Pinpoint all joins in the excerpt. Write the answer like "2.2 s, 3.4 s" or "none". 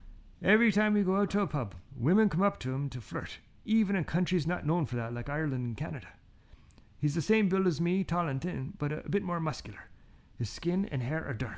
none